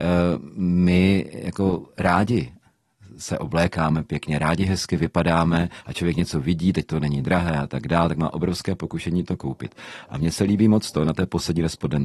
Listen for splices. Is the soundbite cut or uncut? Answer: uncut